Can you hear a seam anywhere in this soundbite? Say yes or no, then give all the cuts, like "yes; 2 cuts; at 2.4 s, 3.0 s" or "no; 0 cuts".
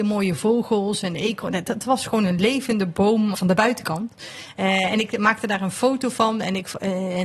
yes; 1 cut; at 3.3 s